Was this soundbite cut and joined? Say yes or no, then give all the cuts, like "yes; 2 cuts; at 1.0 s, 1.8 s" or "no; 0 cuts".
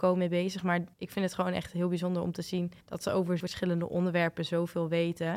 yes; 3 cuts; at 0.9 s, 2.8 s, 3.4 s